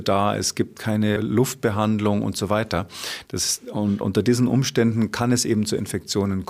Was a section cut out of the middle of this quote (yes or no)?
yes